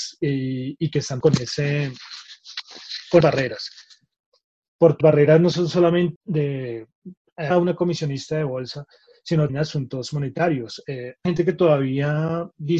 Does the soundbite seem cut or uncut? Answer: cut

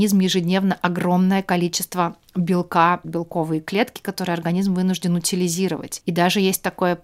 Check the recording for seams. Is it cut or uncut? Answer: cut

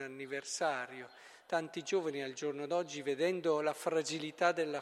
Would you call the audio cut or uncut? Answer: uncut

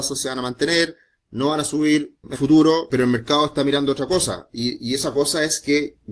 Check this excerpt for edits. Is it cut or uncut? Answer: cut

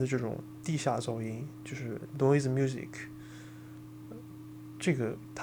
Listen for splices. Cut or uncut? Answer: uncut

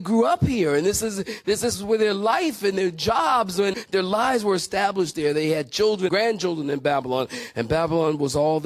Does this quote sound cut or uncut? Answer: cut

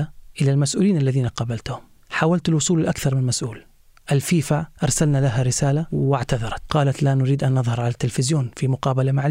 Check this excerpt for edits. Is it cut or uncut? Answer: uncut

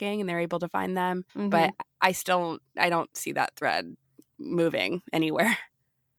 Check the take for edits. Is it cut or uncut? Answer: cut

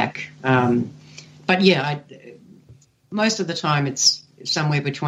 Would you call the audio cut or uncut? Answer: uncut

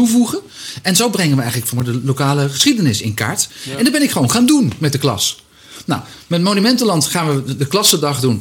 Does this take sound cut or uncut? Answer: uncut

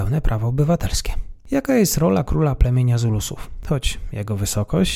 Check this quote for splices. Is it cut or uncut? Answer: uncut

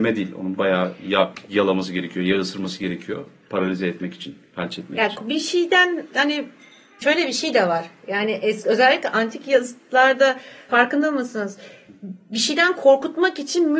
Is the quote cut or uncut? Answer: uncut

